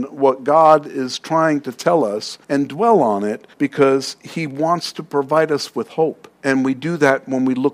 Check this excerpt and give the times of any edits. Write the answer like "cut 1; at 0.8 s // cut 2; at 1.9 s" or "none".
cut 1; at 2.4 s // cut 2; at 3.5 s // cut 3; at 6.3 s